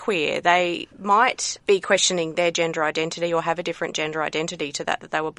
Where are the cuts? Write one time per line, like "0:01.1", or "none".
0:00.9